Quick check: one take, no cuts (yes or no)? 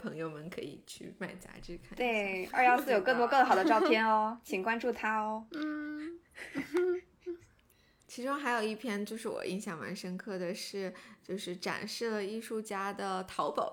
yes